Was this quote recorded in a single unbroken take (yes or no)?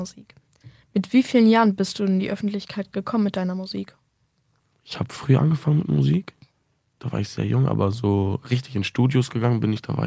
yes